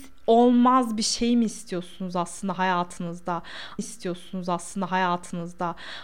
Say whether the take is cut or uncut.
cut